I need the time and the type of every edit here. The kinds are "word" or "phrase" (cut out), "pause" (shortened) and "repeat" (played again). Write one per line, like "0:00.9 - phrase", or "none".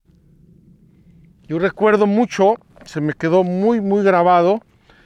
none